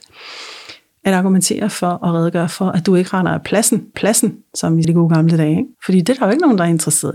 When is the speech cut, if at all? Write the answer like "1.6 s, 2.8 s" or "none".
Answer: 3.9 s, 4.8 s, 5.7 s